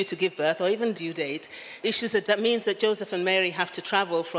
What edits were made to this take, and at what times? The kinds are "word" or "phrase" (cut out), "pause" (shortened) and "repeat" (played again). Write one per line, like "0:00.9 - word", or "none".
0:00.9 - phrase
0:01.8 - word
0:02.2 - word